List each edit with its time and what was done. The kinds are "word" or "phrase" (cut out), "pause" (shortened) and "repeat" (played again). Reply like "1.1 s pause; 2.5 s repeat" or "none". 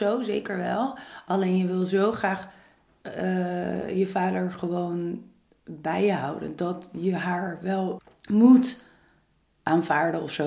none